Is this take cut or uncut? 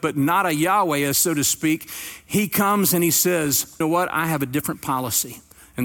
cut